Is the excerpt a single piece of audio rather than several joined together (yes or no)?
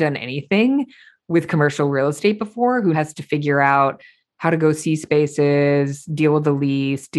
no